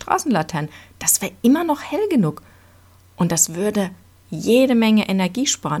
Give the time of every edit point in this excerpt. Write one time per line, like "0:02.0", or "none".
none